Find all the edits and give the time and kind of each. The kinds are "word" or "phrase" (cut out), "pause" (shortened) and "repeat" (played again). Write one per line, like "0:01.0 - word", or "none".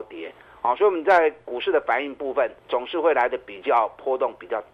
0:02.6 - pause